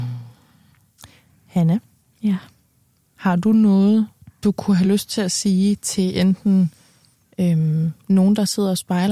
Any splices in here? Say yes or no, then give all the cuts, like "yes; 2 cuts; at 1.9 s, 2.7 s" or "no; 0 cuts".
no; 0 cuts